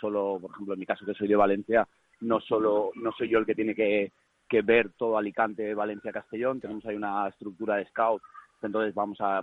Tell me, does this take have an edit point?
no; 0 cuts

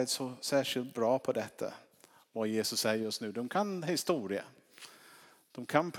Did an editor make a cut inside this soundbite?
no; 0 cuts

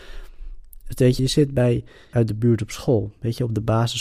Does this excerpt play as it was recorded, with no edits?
no; 2 cuts; at 1.2 s, 2.1 s

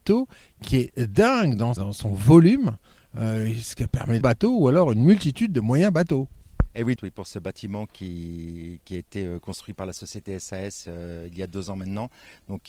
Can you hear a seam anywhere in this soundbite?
yes; 3 cuts; at 1.8 s, 4.2 s, 7.0 s

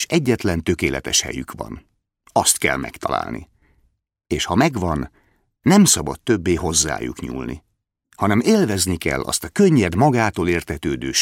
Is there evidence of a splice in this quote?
no; 0 cuts

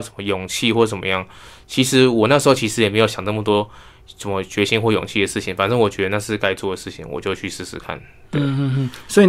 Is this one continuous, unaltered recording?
yes; 0 cuts

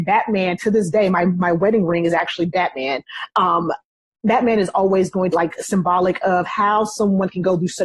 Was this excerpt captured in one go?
no; 1 cut; at 5.3 s

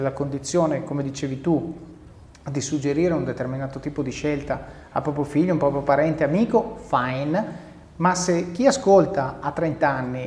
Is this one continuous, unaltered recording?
yes; 0 cuts

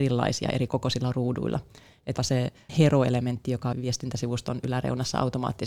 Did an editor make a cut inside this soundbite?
yes; 3 cuts; at 2.2 s, 2.7 s, 3.7 s

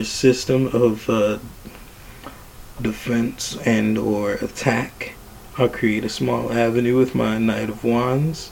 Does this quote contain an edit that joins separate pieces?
no; 0 cuts

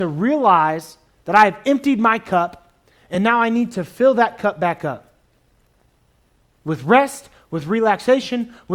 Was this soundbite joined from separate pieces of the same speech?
no; 0 cuts

